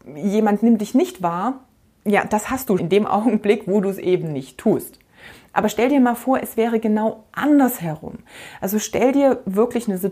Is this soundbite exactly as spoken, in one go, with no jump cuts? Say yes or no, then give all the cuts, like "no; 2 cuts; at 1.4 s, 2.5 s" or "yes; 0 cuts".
no; 1 cut; at 2.8 s